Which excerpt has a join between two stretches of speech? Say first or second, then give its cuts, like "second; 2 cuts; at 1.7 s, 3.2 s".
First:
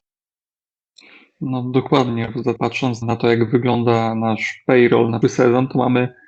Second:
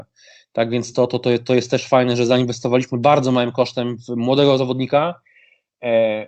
first; 3 cuts; at 2.6 s, 3.0 s, 5.2 s